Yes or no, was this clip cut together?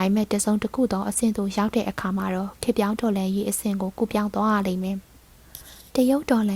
yes